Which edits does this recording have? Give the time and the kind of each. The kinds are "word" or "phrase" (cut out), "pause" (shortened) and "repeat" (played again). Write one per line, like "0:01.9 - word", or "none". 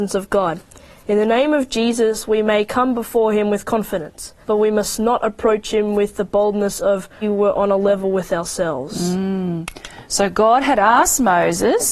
0:04.4 - pause
0:07.2 - phrase